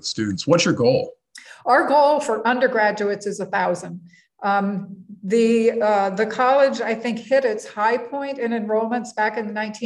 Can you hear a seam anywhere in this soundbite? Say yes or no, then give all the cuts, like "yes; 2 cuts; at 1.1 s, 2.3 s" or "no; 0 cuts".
no; 0 cuts